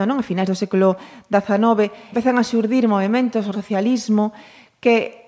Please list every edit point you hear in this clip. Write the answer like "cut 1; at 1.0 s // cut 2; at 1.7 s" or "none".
cut 1; at 2.1 s // cut 2; at 3.5 s